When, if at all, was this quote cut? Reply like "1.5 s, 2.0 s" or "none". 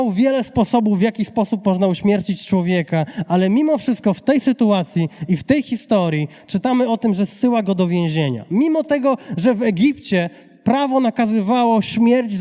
none